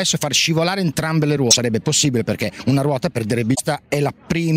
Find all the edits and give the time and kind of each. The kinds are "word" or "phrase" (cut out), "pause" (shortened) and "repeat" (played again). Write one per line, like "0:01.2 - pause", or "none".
none